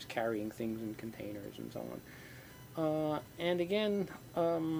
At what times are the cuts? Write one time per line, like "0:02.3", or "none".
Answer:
none